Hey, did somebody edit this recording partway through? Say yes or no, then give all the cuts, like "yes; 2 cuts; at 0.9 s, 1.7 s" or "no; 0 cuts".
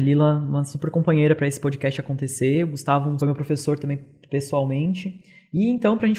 yes; 1 cut; at 3.2 s